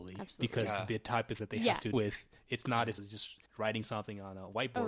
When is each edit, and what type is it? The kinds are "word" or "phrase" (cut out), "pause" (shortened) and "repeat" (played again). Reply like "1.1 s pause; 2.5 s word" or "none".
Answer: 1.4 s word; 1.9 s word; 3.0 s word; 3.5 s pause